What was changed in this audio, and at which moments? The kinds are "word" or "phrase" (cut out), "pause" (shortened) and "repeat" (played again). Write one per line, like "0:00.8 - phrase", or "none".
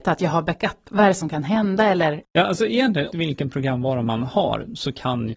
0:02.2 - word
0:03.1 - word